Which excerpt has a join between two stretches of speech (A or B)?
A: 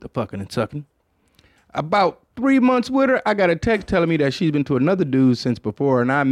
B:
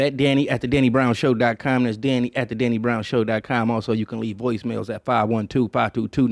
A